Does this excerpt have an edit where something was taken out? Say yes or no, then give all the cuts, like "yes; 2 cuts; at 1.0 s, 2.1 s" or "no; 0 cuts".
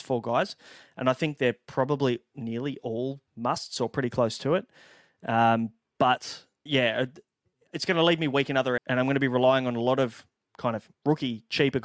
yes; 3 cuts; at 3.3 s, 6.7 s, 8.8 s